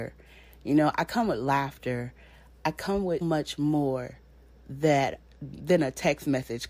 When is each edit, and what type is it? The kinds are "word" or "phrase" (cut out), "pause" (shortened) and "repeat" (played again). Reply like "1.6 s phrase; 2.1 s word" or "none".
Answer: 3.2 s word